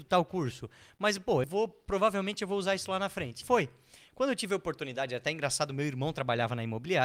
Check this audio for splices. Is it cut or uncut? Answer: cut